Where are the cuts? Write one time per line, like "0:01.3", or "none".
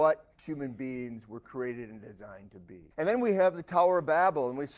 0:02.9